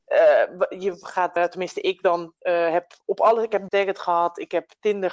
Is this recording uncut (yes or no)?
no